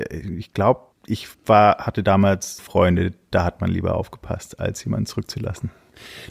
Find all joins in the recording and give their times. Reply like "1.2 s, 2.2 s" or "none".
1.3 s, 2.6 s